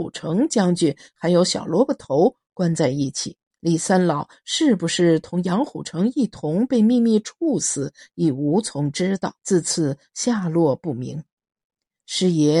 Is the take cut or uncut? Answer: cut